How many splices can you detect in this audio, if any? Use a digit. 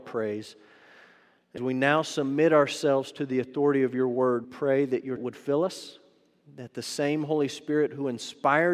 3